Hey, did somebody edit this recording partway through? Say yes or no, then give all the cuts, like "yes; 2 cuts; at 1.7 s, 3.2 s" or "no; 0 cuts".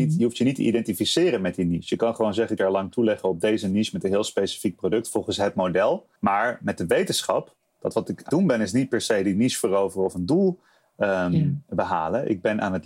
yes; 3 cuts; at 2.6 s, 6.2 s, 8.3 s